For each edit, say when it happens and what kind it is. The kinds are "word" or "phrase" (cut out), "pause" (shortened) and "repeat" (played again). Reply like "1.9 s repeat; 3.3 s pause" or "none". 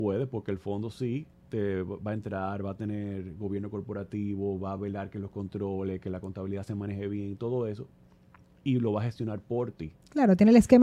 none